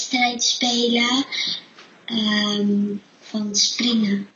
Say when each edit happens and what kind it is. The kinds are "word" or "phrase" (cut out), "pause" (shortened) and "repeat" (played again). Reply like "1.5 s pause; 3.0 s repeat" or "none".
none